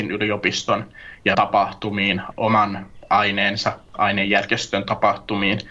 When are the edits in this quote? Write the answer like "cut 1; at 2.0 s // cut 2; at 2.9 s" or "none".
cut 1; at 1.3 s // cut 2; at 2.3 s